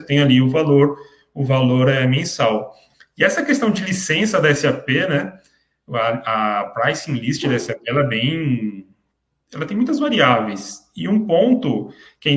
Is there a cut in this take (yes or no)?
no